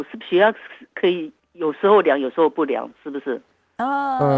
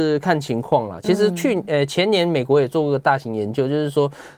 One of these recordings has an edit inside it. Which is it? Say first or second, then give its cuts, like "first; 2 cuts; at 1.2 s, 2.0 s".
first; 1 cut; at 1.4 s